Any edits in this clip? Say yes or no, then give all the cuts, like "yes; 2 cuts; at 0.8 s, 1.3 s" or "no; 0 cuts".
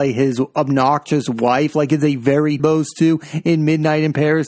yes; 1 cut; at 2.6 s